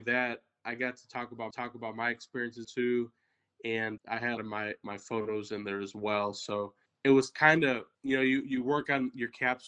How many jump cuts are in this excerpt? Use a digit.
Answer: 6